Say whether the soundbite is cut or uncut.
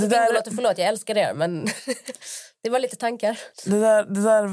cut